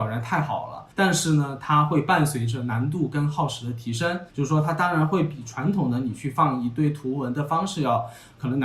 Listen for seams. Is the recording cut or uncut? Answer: cut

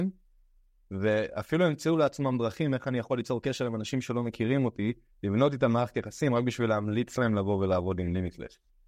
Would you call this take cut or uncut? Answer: uncut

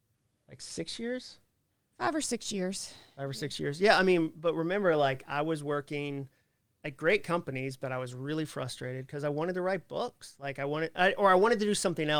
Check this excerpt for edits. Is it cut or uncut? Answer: uncut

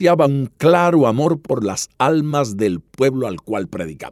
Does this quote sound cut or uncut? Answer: uncut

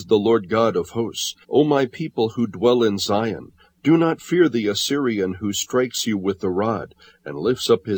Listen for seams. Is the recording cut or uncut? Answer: cut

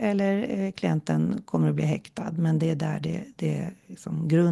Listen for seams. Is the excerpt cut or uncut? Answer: uncut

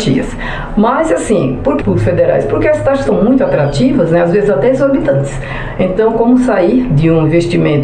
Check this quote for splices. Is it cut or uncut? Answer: cut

